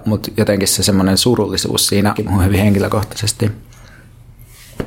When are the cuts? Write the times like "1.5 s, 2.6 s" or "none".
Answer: 2.2 s